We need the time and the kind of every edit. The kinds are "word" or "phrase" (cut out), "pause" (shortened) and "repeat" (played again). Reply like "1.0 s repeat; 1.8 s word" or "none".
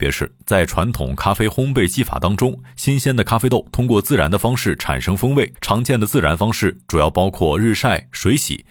5.5 s pause